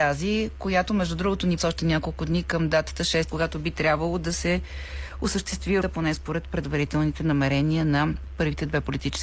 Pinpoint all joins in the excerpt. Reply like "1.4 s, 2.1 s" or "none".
1.6 s, 3.3 s, 5.8 s